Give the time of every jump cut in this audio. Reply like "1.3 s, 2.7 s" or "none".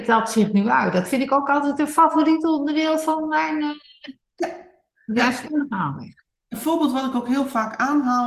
none